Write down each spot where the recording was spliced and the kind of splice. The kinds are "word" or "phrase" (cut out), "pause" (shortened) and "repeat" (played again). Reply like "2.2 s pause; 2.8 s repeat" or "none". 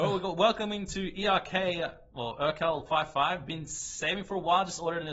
none